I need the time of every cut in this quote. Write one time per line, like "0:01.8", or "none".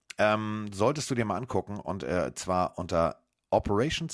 none